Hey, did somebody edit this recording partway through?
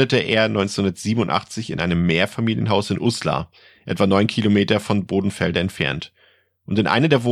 no; 0 cuts

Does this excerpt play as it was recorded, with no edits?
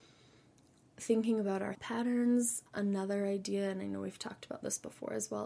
no; 2 cuts; at 1.7 s, 2.7 s

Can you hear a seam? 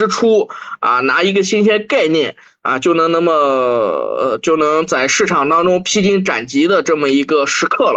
no; 0 cuts

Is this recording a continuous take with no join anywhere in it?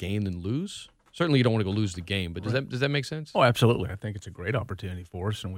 yes; 0 cuts

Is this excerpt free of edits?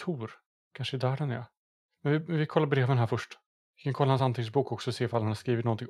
yes; 0 cuts

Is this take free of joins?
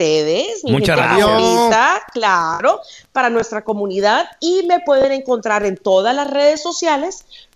yes; 0 cuts

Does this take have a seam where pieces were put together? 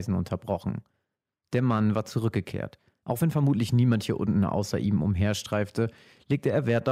no; 0 cuts

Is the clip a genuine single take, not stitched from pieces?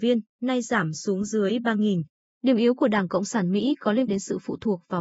no; 1 cut; at 4.1 s

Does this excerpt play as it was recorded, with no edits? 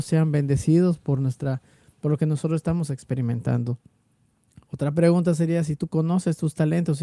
yes; 0 cuts

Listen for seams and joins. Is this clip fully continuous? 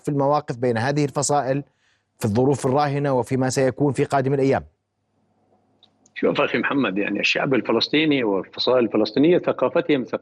yes; 0 cuts

